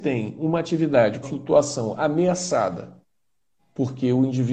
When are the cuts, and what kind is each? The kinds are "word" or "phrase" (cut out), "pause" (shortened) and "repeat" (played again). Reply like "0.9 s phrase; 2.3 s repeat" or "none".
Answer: 1.2 s phrase